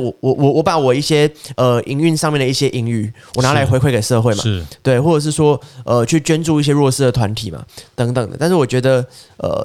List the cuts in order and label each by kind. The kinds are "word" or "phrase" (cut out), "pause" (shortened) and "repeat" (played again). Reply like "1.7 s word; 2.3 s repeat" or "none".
none